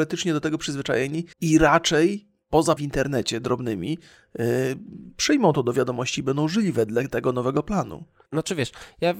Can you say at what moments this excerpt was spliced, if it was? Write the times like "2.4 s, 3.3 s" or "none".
1.3 s, 2.8 s, 8.3 s